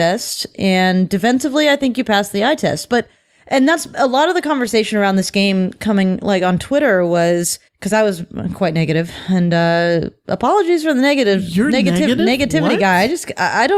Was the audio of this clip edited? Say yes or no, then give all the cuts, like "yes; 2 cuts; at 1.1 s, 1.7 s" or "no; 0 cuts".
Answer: yes; 1 cut; at 7.7 s